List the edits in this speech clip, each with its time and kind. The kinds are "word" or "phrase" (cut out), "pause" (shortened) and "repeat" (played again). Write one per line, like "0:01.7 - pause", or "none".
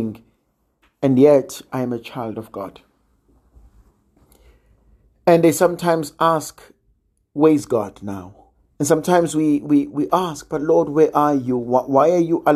0:08.5 - pause